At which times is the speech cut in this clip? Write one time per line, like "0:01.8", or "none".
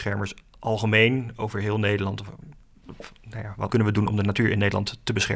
0:03.7